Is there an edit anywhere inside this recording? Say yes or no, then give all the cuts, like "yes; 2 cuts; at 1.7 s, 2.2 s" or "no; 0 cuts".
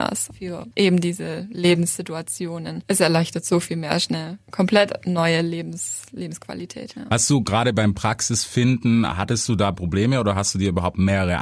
no; 0 cuts